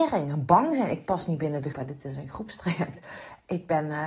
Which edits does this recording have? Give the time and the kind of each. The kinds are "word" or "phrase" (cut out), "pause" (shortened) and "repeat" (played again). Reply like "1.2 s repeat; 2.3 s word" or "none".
1.7 s word